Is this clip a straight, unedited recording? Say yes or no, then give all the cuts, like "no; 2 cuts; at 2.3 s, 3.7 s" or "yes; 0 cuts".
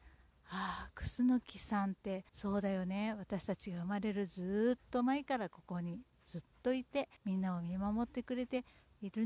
no; 2 cuts; at 2.3 s, 7.2 s